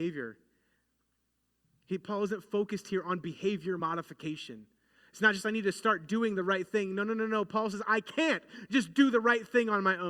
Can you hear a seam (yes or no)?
no